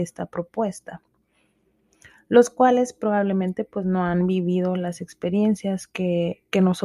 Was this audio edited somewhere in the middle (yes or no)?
no